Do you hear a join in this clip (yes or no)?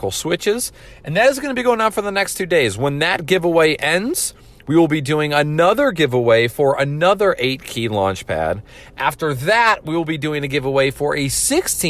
no